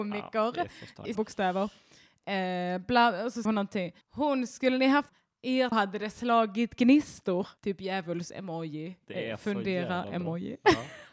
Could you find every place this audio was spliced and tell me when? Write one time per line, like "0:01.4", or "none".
0:01.1
0:03.4
0:04.0
0:05.1
0:05.7
0:07.6